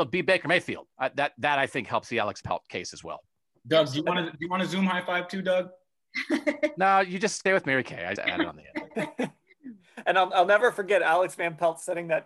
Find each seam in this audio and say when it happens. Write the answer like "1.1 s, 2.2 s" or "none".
0.9 s, 2.4 s, 7.5 s, 8.2 s

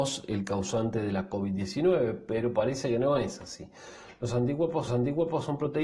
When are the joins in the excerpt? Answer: 4.9 s

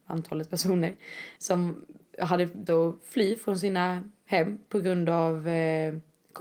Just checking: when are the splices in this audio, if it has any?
1.4 s, 2.7 s

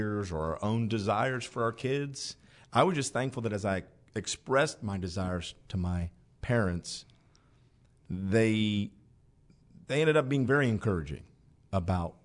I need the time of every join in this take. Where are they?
none

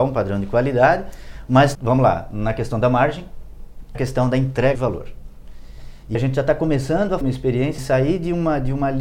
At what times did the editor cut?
1.7 s, 3.9 s, 4.7 s, 6.1 s, 7.2 s, 7.8 s

